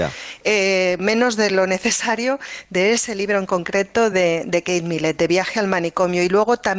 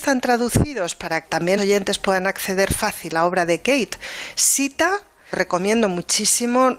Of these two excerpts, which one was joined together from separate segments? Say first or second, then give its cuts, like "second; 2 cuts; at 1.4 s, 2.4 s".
second; 4 cuts; at 1.2 s, 1.6 s, 3.1 s, 5.3 s